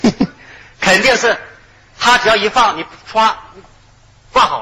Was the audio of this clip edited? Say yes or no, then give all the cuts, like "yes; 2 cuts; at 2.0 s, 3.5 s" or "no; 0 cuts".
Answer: no; 0 cuts